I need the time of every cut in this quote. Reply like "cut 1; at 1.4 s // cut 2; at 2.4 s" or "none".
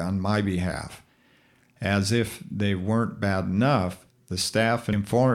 none